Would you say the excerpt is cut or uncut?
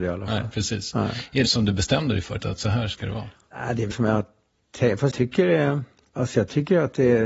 cut